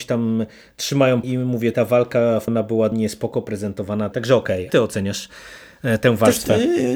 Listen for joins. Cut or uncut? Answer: cut